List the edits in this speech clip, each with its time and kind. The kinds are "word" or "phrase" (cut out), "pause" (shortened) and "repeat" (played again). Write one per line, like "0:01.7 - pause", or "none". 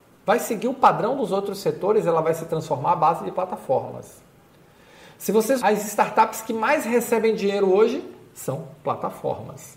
0:05.6 - word